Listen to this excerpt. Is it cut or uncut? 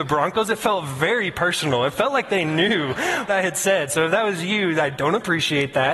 cut